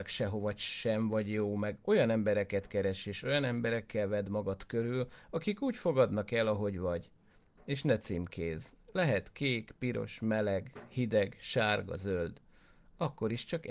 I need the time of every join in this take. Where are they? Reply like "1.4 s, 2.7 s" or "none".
none

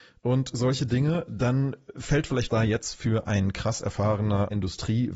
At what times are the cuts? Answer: 2.5 s

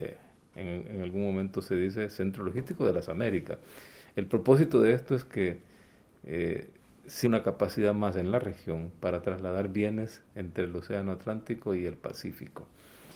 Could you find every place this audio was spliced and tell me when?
7.2 s

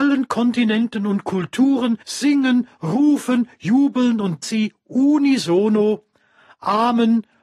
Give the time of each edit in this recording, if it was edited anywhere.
2.0 s, 4.4 s

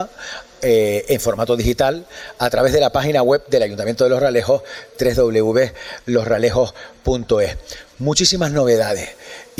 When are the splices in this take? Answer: none

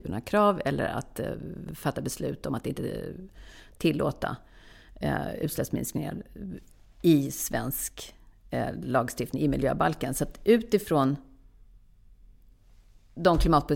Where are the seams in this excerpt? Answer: none

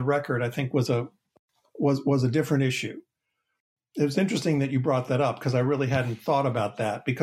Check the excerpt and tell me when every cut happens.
none

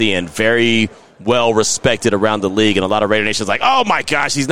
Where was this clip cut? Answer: none

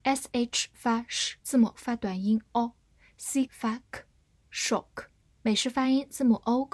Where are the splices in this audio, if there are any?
1.4 s, 1.7 s, 3.5 s, 5.3 s

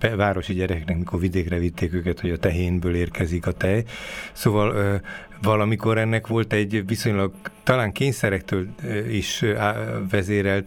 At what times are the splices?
4.7 s

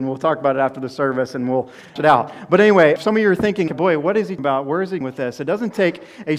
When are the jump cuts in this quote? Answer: 2.0 s, 3.0 s, 3.7 s, 4.4 s, 5.0 s

